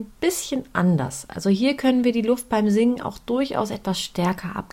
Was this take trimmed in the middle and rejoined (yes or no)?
no